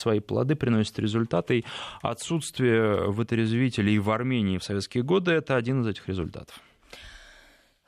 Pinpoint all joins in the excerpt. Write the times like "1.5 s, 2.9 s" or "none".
none